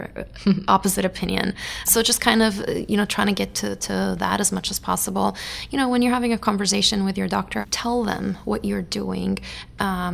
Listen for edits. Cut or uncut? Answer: uncut